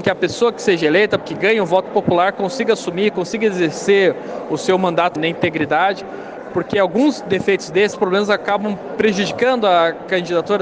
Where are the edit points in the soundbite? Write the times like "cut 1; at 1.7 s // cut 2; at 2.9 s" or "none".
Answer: cut 1; at 1.2 s // cut 2; at 5.2 s // cut 3; at 7.9 s